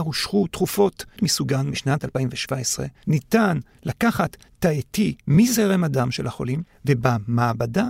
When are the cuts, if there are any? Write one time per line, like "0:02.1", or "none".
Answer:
0:01.2
0:03.0